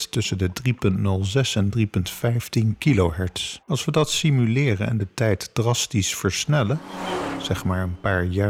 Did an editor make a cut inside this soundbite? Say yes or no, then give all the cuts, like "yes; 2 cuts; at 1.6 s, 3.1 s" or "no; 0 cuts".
yes; 1 cut; at 3.6 s